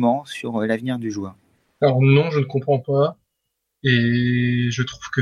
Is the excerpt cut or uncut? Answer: uncut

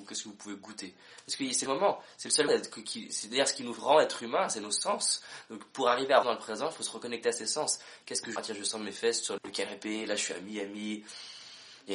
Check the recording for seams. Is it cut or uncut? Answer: cut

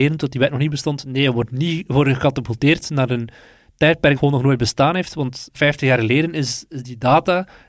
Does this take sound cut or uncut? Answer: cut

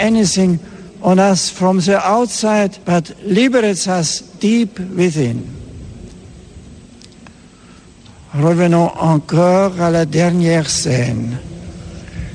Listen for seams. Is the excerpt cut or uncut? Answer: cut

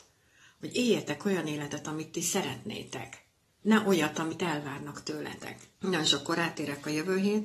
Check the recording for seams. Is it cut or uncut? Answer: cut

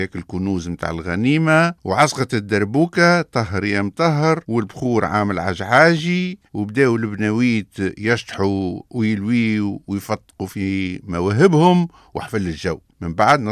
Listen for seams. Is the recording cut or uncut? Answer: cut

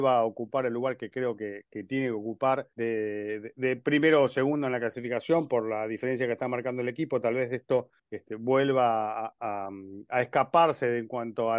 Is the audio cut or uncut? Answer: cut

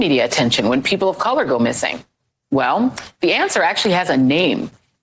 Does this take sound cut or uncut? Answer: uncut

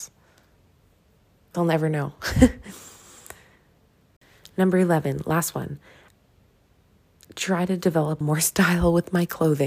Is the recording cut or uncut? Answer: cut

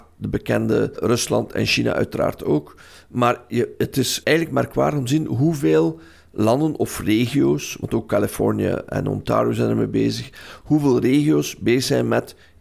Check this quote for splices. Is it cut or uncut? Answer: cut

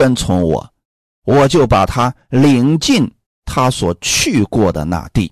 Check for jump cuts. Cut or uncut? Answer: cut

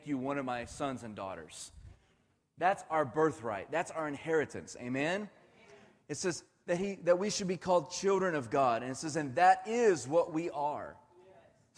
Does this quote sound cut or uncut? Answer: uncut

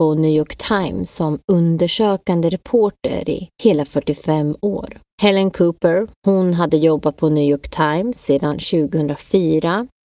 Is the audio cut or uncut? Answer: cut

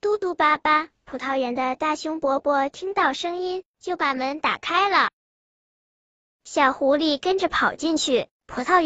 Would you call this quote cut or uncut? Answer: uncut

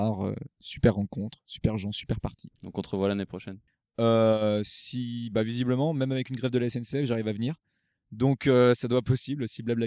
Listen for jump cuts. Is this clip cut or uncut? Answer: cut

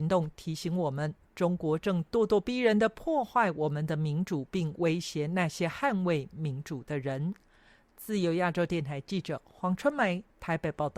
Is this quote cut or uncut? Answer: uncut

